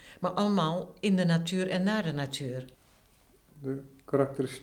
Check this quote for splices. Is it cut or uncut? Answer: uncut